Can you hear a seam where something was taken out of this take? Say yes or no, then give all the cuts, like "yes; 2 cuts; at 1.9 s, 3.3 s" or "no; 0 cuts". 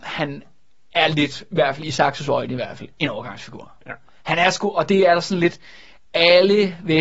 no; 0 cuts